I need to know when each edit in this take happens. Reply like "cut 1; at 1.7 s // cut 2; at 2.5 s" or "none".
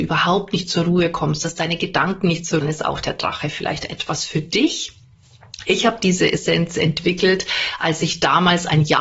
cut 1; at 2.6 s